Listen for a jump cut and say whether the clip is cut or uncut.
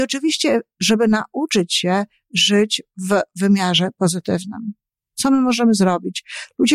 uncut